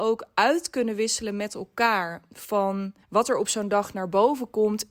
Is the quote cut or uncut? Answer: cut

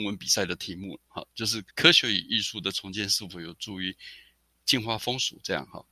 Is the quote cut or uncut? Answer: cut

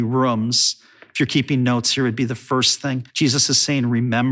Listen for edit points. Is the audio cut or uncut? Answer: cut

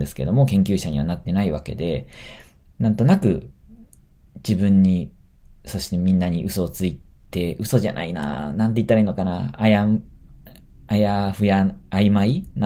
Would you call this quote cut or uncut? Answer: cut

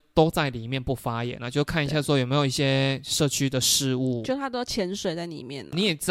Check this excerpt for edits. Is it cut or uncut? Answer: uncut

